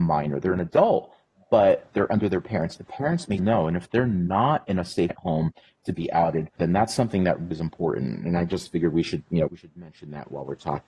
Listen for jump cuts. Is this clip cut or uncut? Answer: cut